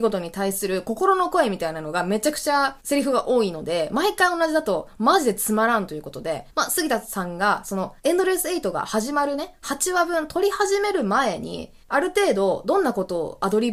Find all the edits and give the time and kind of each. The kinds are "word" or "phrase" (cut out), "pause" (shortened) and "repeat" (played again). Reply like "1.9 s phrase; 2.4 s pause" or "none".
2.8 s pause; 6.5 s pause; 8.0 s pause; 11.8 s pause

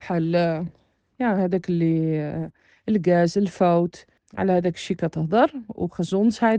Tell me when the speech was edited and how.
none

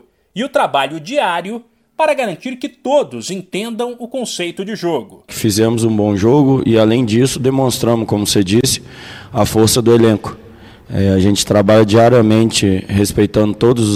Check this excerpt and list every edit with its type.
none

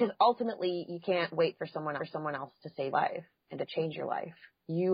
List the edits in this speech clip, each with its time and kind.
2.0 s repeat; 2.9 s word

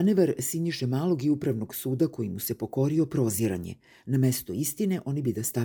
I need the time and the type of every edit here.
none

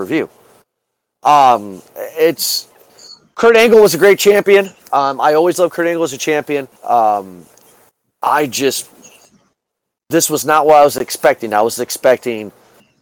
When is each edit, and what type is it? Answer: 6.8 s pause

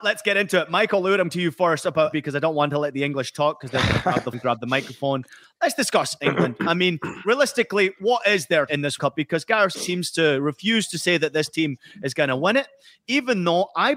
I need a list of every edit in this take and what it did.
1.3 s word; 2.1 s word; 4.3 s word; 8.7 s word; 9.0 s word; 9.7 s word

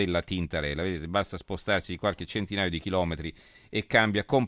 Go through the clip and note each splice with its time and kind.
none

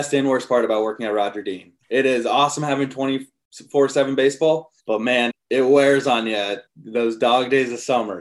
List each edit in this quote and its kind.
4.8 s pause; 5.3 s word; 6.7 s pause

